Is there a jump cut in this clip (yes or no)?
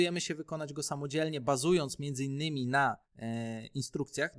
yes